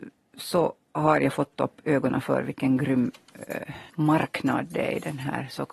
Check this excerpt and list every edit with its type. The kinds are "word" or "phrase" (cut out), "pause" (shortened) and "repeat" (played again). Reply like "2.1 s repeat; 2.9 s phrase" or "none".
3.9 s pause